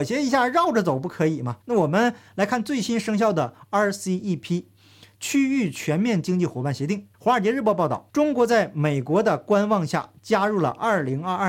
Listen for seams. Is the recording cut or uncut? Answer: cut